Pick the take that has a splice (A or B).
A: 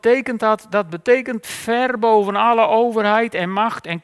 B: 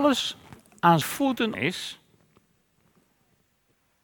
B